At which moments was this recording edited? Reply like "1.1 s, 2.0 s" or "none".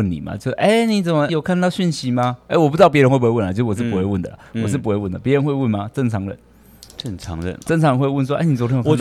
1.3 s, 6.9 s